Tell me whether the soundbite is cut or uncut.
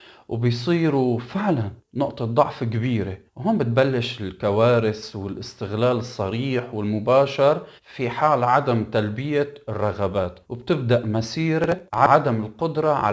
cut